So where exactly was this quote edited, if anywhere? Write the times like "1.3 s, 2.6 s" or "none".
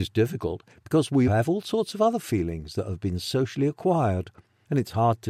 1.3 s